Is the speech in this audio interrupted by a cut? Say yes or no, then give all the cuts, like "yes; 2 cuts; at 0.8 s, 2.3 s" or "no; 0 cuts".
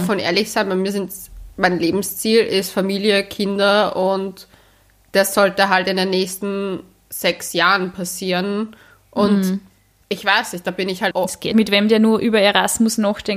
yes; 2 cuts; at 11.1 s, 11.5 s